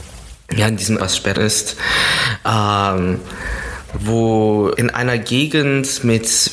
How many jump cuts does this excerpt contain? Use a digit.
3